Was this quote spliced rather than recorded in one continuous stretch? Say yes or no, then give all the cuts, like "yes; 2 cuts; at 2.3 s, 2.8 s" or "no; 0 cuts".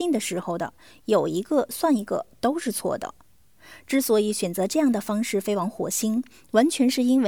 no; 0 cuts